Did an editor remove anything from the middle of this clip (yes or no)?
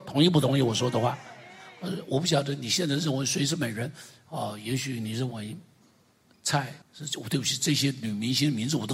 yes